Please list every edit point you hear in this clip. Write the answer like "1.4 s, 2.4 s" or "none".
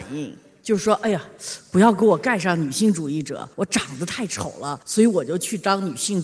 4.8 s